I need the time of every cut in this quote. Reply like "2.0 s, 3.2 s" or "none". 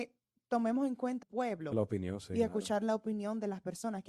1.2 s, 1.7 s